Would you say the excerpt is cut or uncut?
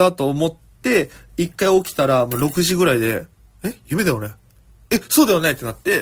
uncut